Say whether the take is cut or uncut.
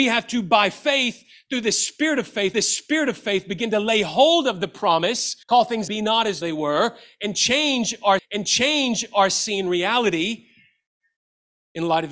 cut